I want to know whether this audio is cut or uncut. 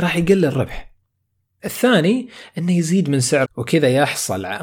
cut